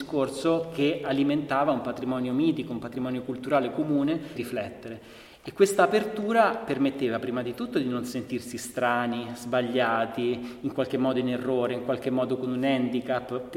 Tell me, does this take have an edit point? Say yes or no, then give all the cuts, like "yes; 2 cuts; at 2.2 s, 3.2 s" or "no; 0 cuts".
yes; 1 cut; at 4.3 s